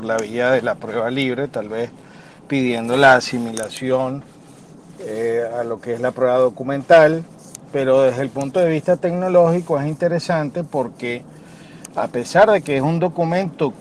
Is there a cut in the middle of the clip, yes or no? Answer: no